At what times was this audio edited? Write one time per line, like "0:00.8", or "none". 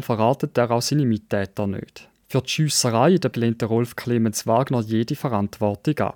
0:03.3